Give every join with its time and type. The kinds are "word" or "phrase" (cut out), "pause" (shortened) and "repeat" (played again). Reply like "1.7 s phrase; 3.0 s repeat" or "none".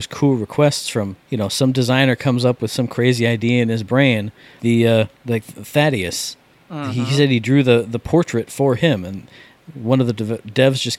1.2 s pause; 4.6 s word; 5.1 s pause